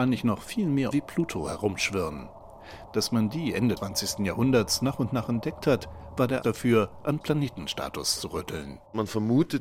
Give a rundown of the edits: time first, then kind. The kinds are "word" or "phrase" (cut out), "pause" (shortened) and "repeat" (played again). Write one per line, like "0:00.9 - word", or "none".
0:00.9 - word
0:03.8 - word
0:06.4 - word
0:07.2 - word